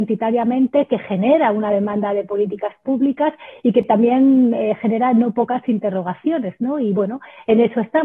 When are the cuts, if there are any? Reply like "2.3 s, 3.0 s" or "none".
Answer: none